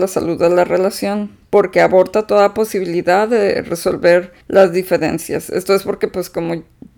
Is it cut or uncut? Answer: cut